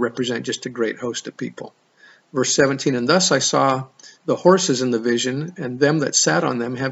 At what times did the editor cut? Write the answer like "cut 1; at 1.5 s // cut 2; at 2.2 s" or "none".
cut 1; at 4.1 s